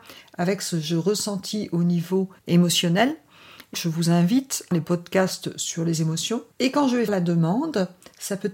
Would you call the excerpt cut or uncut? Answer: cut